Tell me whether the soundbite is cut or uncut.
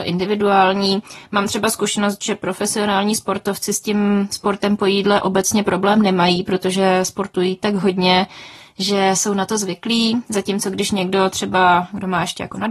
uncut